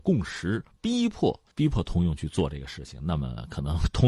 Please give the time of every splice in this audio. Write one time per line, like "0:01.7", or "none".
0:01.5

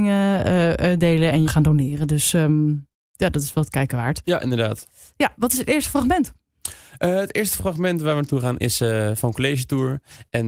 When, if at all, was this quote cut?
0:01.4

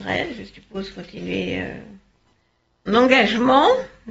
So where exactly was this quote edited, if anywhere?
0:02.9

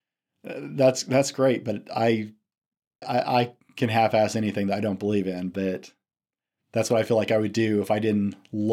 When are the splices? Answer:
0:03.0

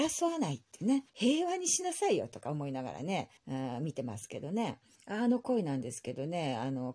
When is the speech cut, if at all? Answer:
0:01.1
0:03.4
0:05.0

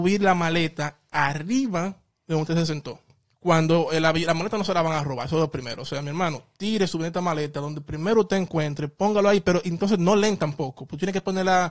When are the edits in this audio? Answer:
none

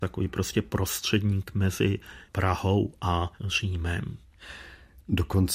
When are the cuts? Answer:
0:03.4

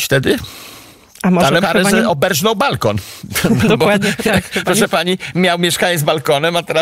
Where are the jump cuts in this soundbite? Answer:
0:01.6

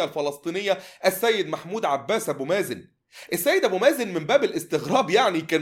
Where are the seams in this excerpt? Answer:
none

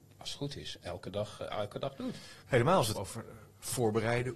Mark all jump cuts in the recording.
0:02.4
0:02.9

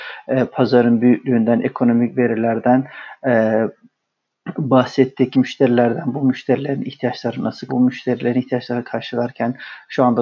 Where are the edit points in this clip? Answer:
0:05.3
0:07.7

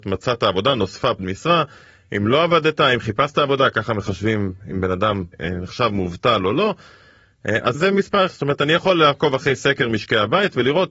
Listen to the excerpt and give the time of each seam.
0:01.2
0:05.3
0:07.7
0:08.3

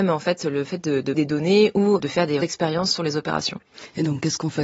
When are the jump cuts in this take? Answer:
0:01.1
0:02.0
0:02.4

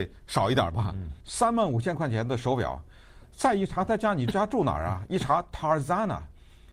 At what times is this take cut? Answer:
0:01.2

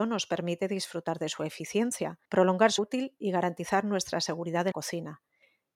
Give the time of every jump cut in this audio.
0:02.2
0:02.8
0:04.7

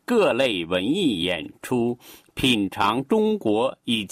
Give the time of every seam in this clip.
none

